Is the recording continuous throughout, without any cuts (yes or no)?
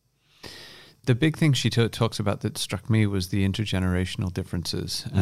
yes